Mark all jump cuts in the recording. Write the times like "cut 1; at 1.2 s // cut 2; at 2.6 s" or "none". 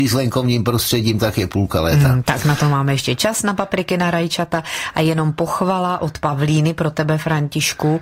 none